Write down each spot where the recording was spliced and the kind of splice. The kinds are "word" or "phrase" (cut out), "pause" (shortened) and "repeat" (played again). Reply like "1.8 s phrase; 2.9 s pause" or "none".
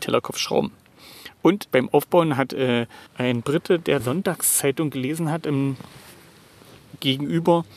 1.7 s word; 3.1 s pause; 4.0 s phrase